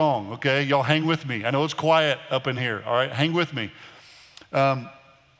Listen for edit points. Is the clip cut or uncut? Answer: uncut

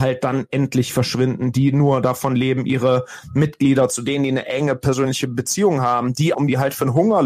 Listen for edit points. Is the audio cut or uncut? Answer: cut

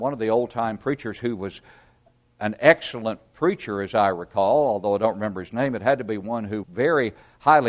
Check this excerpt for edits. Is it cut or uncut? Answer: cut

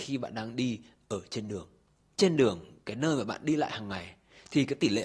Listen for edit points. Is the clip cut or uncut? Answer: uncut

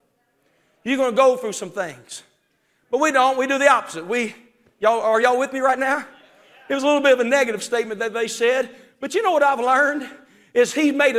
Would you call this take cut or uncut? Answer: uncut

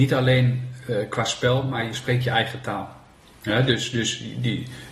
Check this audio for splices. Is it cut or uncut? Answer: uncut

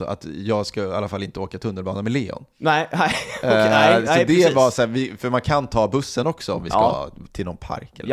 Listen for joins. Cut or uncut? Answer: uncut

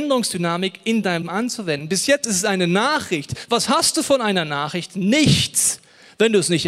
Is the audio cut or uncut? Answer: cut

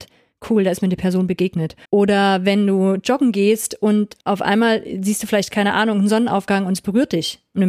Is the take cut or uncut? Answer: cut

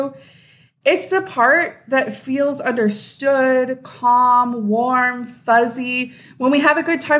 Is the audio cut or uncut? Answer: uncut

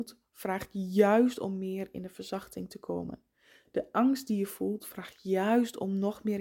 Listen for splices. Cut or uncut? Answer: uncut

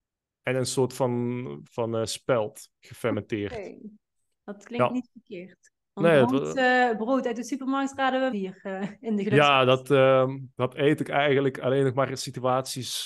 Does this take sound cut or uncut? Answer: cut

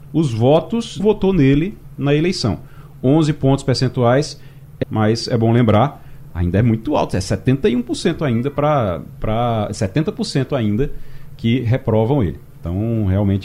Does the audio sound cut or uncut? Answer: cut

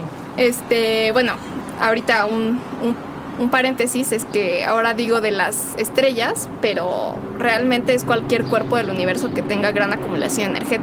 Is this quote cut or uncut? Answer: uncut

